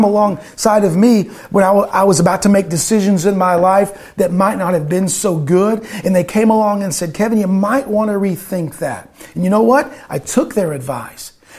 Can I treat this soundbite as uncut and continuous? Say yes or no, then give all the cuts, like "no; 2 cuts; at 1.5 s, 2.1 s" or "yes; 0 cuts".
yes; 0 cuts